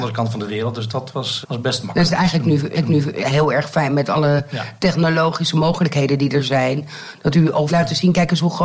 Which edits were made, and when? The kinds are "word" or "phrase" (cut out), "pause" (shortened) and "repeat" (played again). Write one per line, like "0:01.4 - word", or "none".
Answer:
0:01.4 - word
0:02.7 - repeat
0:07.7 - phrase